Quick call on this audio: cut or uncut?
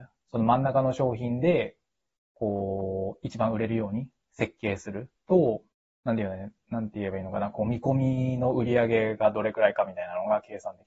cut